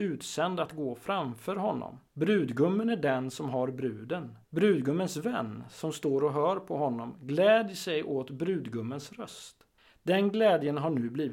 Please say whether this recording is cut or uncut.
cut